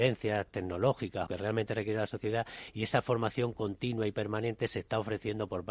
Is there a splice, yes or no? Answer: yes